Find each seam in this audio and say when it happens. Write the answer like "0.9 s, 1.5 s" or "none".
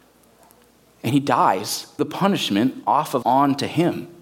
2.0 s, 3.2 s